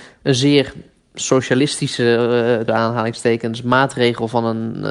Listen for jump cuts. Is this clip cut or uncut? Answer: cut